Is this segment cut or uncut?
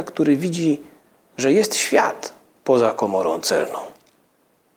uncut